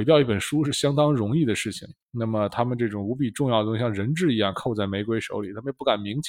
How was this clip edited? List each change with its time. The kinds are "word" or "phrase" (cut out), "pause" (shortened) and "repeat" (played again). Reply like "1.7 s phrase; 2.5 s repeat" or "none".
2.0 s pause

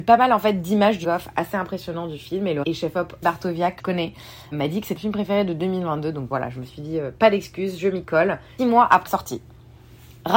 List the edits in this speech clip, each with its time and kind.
1.0 s word; 2.6 s word; 3.2 s word; 3.8 s word; 4.5 s word; 5.0 s word; 6.3 s word; 8.6 s word; 9.1 s word

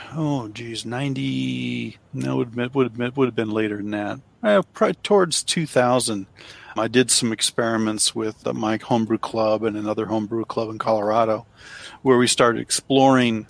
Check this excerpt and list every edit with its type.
2.1 s pause; 2.9 s repeat; 4.9 s word; 6.8 s word; 8.4 s word

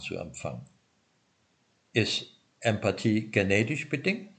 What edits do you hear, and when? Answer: none

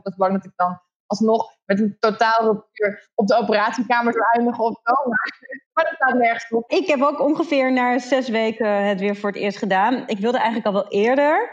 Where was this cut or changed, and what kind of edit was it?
5.6 s pause

